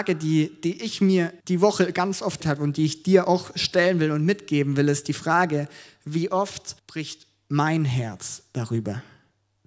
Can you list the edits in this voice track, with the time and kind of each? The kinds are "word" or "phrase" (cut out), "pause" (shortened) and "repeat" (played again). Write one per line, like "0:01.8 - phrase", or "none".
0:01.4 - pause
0:02.4 - phrase
0:06.8 - pause

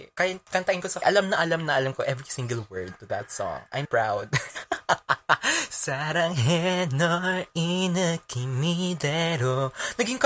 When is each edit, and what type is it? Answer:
0:01.0 - word
0:03.8 - word

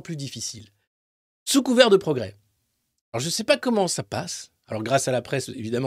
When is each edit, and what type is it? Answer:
none

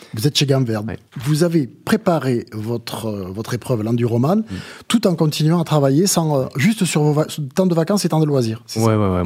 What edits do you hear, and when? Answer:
0:01.1 - pause

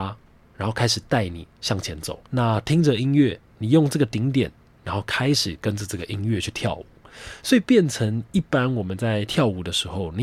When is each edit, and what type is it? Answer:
0:02.3 - pause

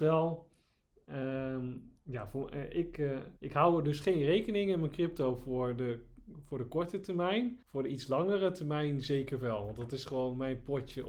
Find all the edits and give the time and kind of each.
0:03.4 - pause
0:07.6 - pause

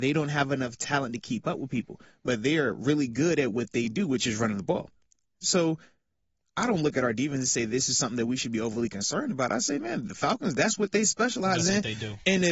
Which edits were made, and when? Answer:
none

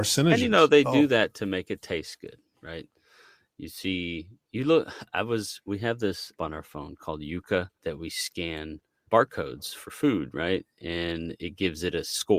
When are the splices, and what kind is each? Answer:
0:06.4 - word
0:07.7 - pause
0:09.1 - word

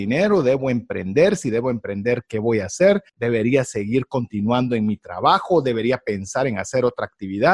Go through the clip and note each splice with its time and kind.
0:03.1 - pause

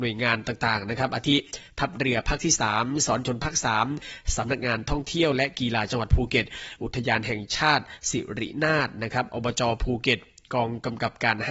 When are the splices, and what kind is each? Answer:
none

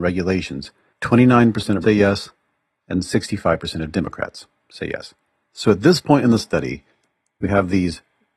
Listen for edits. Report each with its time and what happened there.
0:01.8 - word

